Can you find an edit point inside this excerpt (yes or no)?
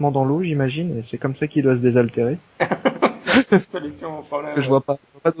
no